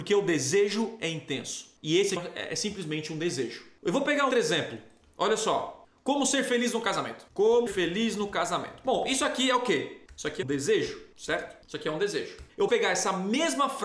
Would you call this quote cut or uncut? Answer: cut